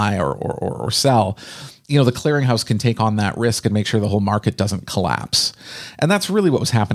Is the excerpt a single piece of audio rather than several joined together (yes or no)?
yes